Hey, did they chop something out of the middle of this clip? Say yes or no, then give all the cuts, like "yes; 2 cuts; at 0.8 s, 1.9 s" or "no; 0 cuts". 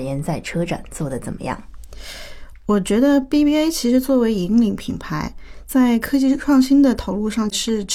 no; 0 cuts